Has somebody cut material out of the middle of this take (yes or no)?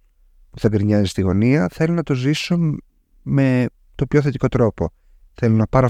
no